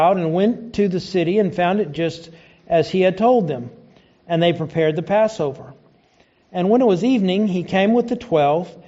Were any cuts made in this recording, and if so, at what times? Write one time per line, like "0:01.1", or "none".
none